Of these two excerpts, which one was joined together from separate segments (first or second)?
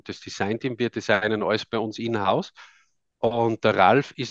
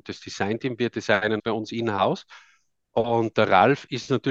second